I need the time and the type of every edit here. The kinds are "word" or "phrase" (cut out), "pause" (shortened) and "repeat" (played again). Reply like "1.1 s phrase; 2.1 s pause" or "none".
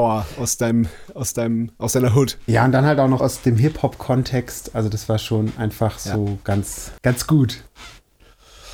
3.2 s word; 7.0 s pause